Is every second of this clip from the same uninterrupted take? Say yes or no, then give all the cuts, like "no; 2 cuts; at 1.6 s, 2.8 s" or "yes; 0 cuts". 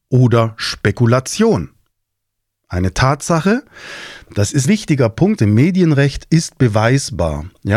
no; 2 cuts; at 4.6 s, 5.4 s